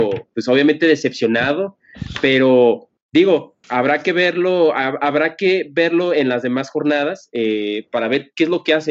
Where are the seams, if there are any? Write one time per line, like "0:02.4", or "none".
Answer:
0:03.6